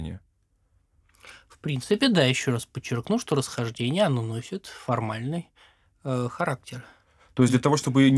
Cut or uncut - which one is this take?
uncut